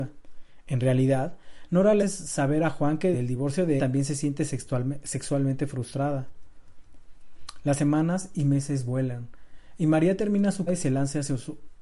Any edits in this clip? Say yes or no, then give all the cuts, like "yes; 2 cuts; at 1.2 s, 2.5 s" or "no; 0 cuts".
yes; 4 cuts; at 2.0 s, 3.1 s, 3.8 s, 10.7 s